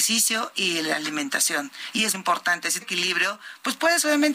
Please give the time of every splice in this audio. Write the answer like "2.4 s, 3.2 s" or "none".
2.1 s, 2.8 s